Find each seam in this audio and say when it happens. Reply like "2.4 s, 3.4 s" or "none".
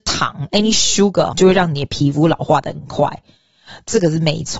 1.3 s